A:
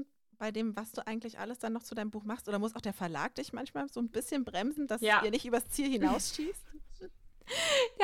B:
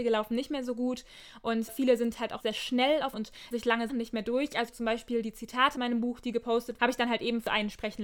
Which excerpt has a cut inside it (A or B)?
B